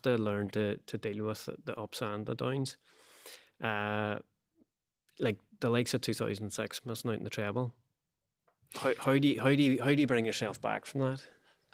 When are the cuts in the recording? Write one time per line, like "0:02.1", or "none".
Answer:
none